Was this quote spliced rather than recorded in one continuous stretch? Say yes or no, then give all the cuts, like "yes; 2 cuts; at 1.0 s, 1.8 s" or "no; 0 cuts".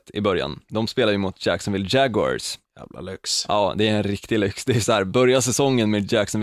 yes; 1 cut; at 2.7 s